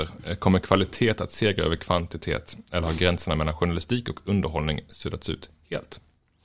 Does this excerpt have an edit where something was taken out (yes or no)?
no